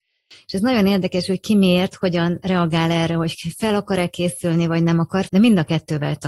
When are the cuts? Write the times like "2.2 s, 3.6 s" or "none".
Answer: 5.3 s